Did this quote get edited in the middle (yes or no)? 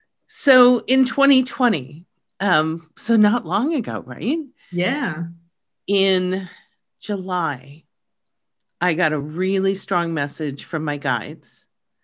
no